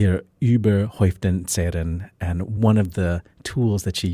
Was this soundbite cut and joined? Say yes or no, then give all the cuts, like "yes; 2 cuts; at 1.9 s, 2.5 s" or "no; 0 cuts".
no; 0 cuts